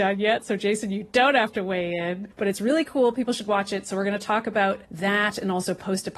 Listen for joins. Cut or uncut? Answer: cut